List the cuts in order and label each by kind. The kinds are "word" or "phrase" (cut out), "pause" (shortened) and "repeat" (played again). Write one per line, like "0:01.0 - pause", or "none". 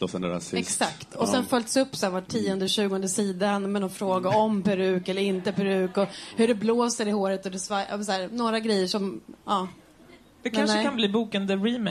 none

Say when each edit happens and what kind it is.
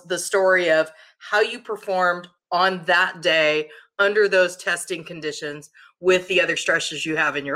none

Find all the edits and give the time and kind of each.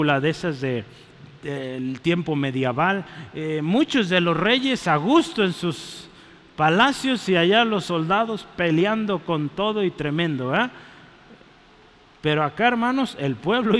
none

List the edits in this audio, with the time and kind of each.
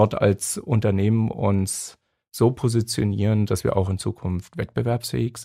none

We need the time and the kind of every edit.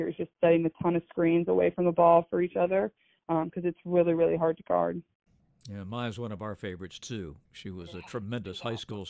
none

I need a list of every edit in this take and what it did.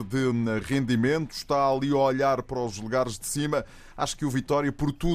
none

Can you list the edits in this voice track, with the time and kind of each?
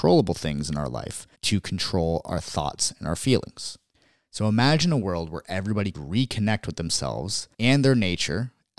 0:01.3 - pause
0:03.9 - pause
0:05.9 - word
0:07.5 - pause

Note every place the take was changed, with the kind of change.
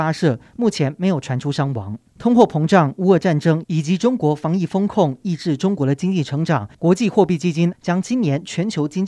0:02.1 - pause
0:06.7 - pause
0:07.7 - word

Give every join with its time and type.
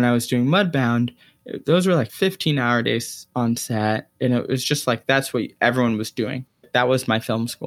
none

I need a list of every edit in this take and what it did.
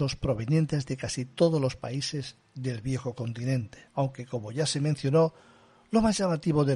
0:03.9 - pause

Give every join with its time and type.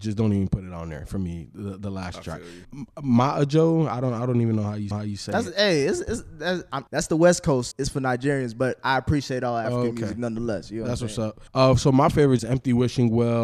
0:02.6 - word
0:04.9 - repeat
0:06.9 - pause
0:07.7 - word
0:11.5 - pause
0:12.4 - phrase

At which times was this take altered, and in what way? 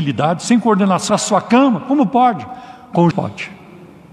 0:01.1 - phrase
0:03.1 - word

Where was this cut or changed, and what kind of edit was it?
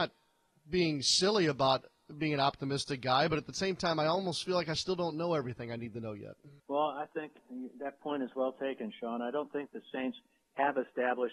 0:06.6 - pause

